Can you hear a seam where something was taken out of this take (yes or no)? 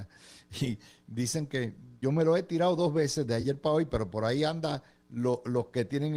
no